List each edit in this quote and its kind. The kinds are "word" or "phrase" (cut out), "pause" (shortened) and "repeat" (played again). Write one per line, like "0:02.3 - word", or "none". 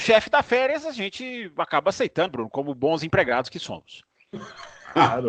0:02.3 - word